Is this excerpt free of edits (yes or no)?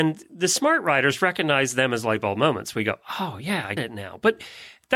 no